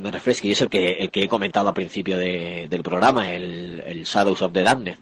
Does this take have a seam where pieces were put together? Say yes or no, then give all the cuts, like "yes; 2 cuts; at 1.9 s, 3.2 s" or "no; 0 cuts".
no; 0 cuts